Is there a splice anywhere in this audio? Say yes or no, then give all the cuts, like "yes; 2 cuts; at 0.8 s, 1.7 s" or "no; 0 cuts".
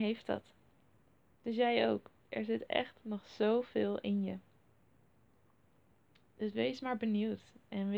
no; 0 cuts